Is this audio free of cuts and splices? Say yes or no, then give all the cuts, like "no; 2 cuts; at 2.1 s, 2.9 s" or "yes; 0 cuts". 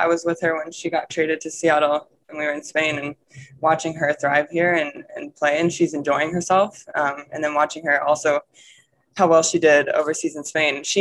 yes; 0 cuts